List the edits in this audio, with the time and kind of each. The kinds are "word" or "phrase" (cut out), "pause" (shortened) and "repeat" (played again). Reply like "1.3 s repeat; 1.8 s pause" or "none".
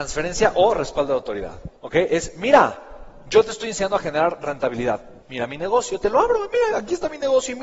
1.8 s pause; 5.2 s pause

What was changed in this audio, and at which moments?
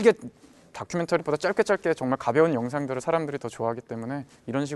1.2 s word

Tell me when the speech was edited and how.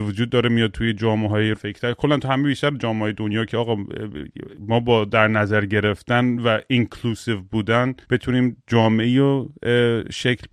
1.5 s word; 4.5 s pause; 8.0 s pause

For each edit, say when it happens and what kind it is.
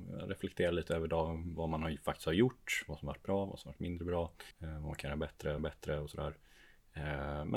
4.5 s pause; 5.6 s repeat

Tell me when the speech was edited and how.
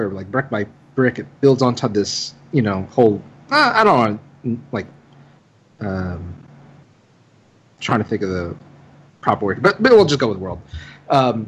none

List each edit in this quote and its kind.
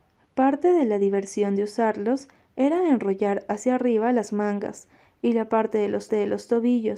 6.1 s repeat

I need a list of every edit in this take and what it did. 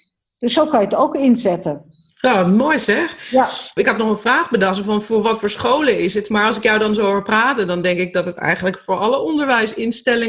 none

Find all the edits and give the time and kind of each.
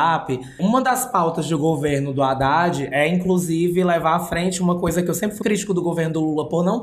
5.4 s word

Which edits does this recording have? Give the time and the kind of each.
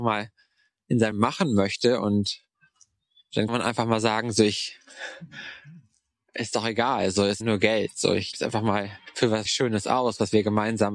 1.1 s word; 3.5 s word; 6.5 s word; 7.4 s word; 8.3 s word; 9.5 s word

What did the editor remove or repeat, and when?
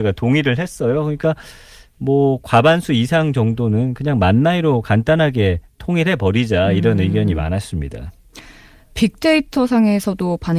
none

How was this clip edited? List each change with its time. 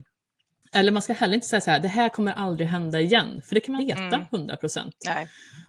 3.8 s word

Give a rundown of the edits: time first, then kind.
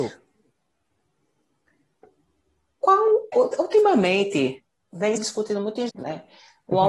3.3 s word; 5.2 s word; 5.9 s word

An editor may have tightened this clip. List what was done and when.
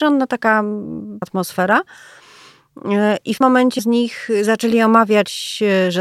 1.2 s word; 3.4 s word; 3.8 s word

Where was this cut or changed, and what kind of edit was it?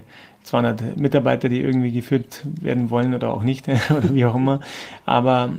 none

